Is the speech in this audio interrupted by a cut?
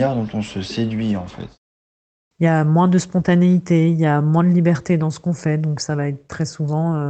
no; 0 cuts

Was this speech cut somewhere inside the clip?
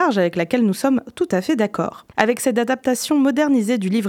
yes; 1 cut; at 2.1 s

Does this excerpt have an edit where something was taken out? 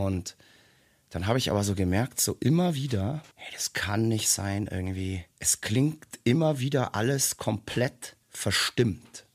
yes; 3 cuts; at 3.3 s, 5.3 s, 8.2 s

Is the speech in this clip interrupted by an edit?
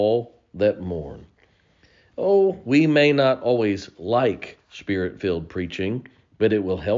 no; 0 cuts

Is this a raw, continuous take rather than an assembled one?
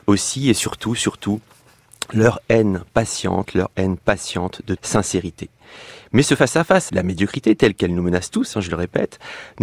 no; 2 cuts; at 4.8 s, 6.9 s

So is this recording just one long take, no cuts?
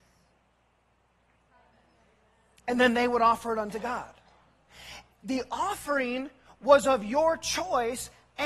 yes; 0 cuts

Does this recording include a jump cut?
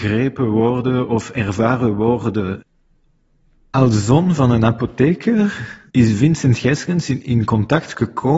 no; 0 cuts

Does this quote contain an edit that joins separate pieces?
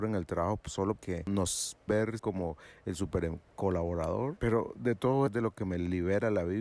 yes; 4 cuts; at 1.0 s, 1.9 s, 2.2 s, 5.3 s

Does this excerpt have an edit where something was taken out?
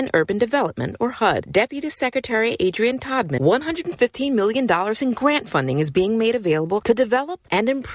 yes; 1 cut; at 3.4 s

